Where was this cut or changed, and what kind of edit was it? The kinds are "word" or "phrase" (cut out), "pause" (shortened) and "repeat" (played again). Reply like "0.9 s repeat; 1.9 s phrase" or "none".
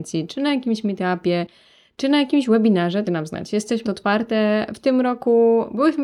3.0 s word; 3.8 s word